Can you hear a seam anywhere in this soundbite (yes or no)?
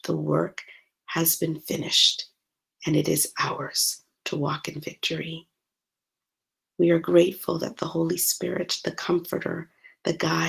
no